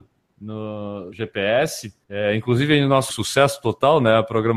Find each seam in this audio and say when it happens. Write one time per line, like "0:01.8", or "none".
0:01.1
0:02.0
0:03.1